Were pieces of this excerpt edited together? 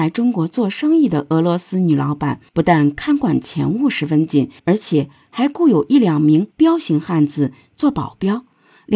yes; 3 cuts; at 2.5 s, 4.6 s, 6.5 s

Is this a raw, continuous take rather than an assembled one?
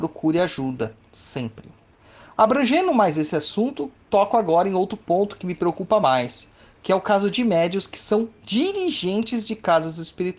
yes; 0 cuts

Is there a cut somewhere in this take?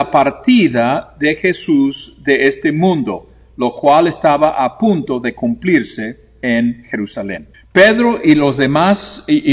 yes; 1 cut; at 7.5 s

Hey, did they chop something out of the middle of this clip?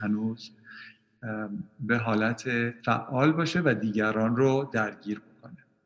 yes; 1 cut; at 2.8 s

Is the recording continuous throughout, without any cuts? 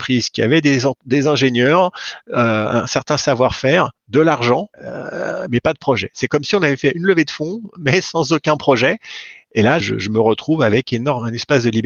no; 3 cuts; at 4.0 s, 4.7 s, 9.8 s

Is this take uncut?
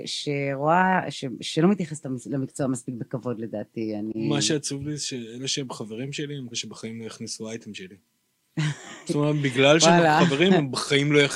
no; 2 cuts; at 1.1 s, 6.5 s

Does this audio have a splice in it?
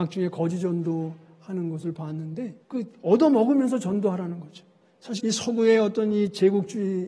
yes; 2 cuts; at 2.6 s, 5.2 s

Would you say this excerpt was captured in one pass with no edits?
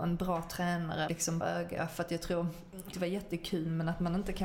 no; 3 cuts; at 1.1 s, 1.4 s, 2.9 s

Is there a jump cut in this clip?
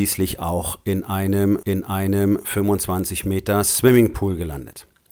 yes; 1 cut; at 1.6 s

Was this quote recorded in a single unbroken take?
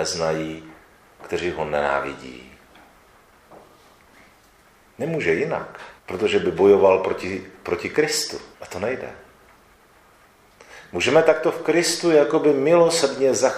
no; 2 cuts; at 6.0 s, 8.5 s

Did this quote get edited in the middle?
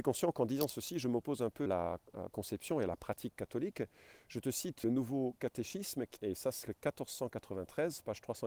yes; 4 cuts; at 1.7 s, 4.8 s, 6.2 s, 6.6 s

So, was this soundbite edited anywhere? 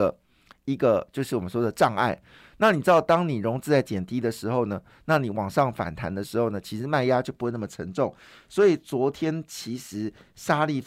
no; 0 cuts

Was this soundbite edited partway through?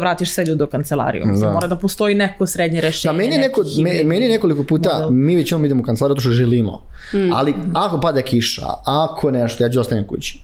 no; 0 cuts

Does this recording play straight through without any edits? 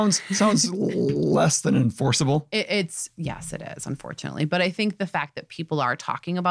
yes; 0 cuts

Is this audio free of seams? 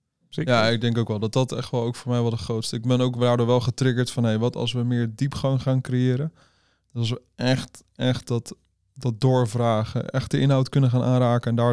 yes; 0 cuts

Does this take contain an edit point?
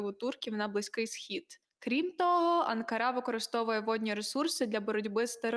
no; 0 cuts

